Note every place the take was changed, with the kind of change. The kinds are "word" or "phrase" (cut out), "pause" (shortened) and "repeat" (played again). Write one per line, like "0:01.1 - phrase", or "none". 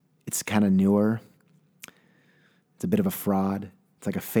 none